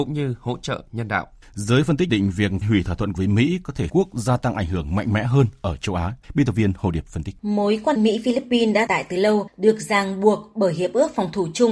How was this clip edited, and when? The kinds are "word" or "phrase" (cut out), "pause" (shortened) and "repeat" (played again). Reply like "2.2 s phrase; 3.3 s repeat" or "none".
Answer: 1.4 s pause; 2.1 s word; 2.6 s word; 3.2 s word; 3.9 s phrase; 6.2 s pause; 7.4 s pause; 8.0 s phrase; 8.9 s word

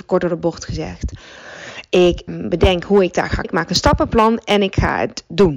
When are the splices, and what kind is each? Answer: 2.3 s word; 3.4 s word

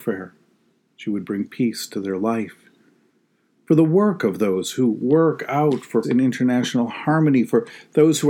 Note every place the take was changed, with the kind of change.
6.0 s word

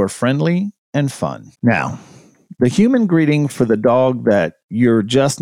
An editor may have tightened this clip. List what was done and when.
1.5 s pause

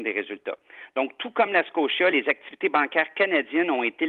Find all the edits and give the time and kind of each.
none

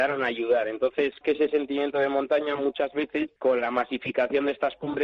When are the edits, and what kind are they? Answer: 1.2 s word; 3.4 s pause

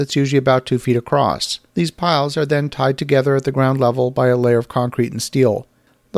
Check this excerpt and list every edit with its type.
1.7 s pause

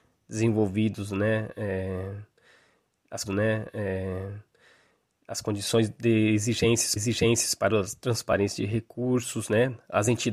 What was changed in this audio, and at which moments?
3.3 s repeat; 7.0 s repeat

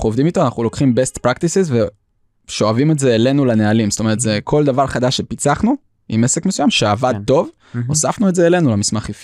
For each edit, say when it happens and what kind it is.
none

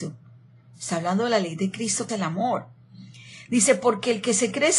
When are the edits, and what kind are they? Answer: 2.1 s word

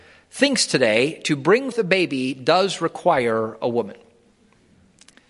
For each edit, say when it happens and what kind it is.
1.7 s word

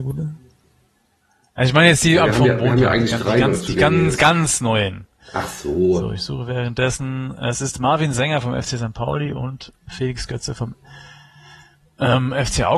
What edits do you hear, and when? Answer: none

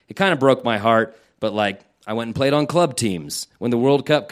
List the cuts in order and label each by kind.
none

